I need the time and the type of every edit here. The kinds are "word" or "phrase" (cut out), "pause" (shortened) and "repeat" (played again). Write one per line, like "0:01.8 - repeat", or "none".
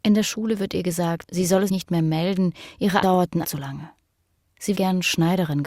0:01.7 - word
0:03.0 - word
0:03.4 - word
0:04.7 - word